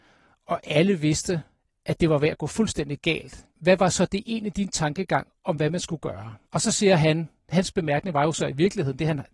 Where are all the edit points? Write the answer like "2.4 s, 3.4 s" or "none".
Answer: 1.6 s, 3.5 s, 6.4 s